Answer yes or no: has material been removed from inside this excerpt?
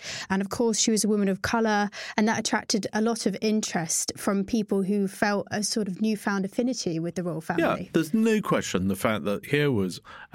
no